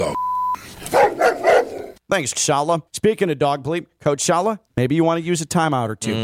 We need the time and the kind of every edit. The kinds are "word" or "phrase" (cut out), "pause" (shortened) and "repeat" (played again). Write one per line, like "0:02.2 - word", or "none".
0:02.3 - word
0:02.9 - pause
0:04.7 - pause